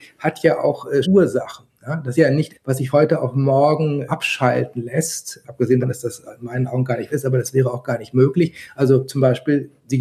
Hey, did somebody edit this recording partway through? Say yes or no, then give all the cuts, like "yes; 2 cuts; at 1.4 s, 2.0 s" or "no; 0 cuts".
yes; 7 cuts; at 1.0 s, 2.1 s, 2.5 s, 2.9 s, 4.1 s, 5.8 s, 7.1 s